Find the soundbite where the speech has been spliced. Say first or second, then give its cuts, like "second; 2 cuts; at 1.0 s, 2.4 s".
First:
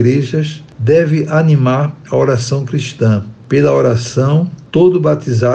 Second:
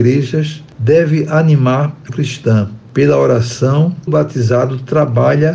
second; 2 cuts; at 2.1 s, 4.1 s